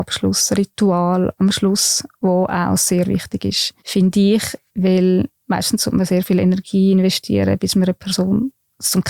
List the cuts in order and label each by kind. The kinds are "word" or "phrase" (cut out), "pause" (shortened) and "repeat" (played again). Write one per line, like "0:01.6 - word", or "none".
0:01.4 - word
0:03.8 - pause
0:04.7 - pause